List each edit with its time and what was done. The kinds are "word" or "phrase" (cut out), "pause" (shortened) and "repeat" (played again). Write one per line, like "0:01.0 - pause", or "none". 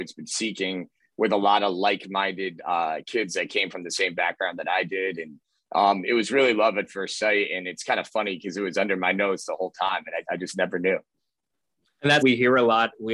0:10.2 - word
0:12.2 - word

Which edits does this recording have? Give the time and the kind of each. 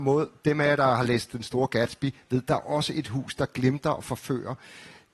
none

